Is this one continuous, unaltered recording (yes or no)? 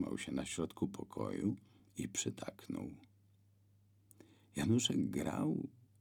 yes